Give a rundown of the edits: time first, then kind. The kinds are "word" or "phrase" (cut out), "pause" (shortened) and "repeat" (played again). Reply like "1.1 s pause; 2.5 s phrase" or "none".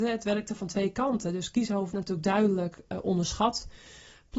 1.9 s word